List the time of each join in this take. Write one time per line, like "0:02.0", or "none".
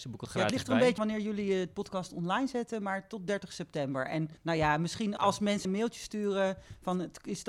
0:01.0
0:04.4
0:05.2
0:05.6